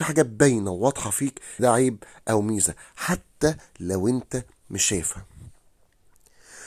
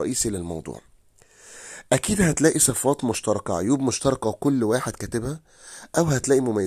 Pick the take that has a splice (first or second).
first